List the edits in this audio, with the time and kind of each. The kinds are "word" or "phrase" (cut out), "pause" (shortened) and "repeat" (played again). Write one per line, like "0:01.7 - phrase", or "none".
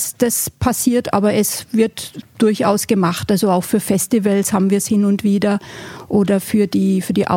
none